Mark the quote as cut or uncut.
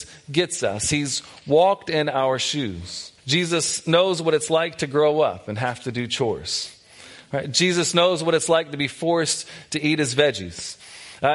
cut